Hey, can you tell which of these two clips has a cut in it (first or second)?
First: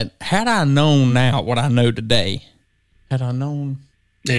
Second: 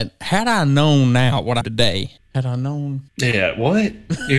second